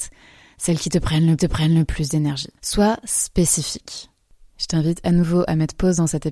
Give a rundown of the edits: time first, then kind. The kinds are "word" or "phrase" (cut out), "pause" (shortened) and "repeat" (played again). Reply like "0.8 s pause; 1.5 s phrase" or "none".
1.4 s repeat; 2.6 s pause

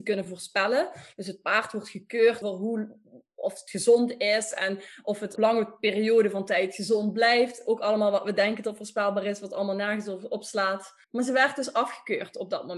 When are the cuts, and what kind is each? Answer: 2.4 s word; 5.4 s word; 11.0 s pause

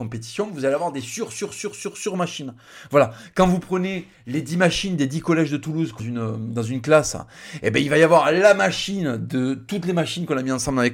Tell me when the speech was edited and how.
6.0 s phrase

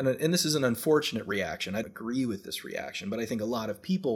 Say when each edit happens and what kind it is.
1.8 s word

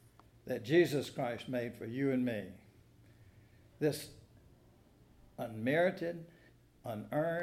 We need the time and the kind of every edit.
none

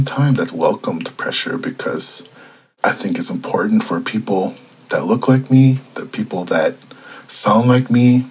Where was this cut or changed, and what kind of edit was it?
none

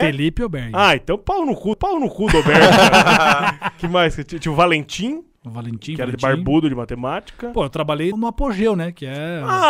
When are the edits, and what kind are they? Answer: 1.7 s repeat; 8.1 s word

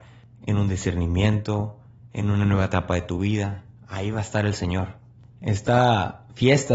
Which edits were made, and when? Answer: none

